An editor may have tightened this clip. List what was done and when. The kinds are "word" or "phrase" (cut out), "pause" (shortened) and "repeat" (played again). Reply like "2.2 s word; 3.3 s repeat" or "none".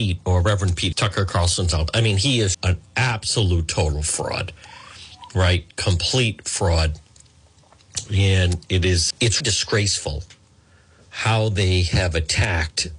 0.9 s word; 1.9 s word; 2.5 s word; 9.1 s word; 9.4 s word